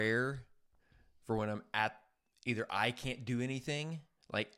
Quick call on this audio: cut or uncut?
uncut